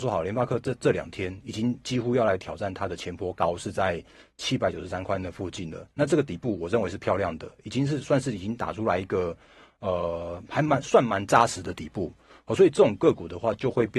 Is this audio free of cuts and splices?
yes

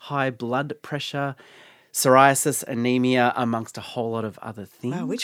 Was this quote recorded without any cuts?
yes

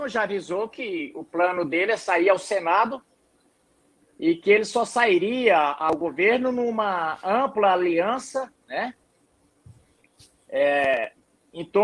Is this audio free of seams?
yes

